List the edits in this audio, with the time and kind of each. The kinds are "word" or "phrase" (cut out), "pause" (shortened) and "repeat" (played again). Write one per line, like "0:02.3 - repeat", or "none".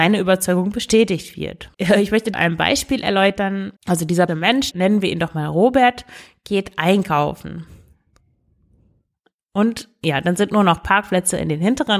0:01.7 - pause
0:02.3 - phrase
0:03.8 - pause
0:04.3 - word
0:04.7 - word